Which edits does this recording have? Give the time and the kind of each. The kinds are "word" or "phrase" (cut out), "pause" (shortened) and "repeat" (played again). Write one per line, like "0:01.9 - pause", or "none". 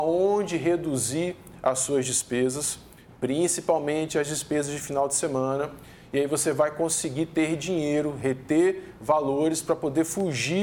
none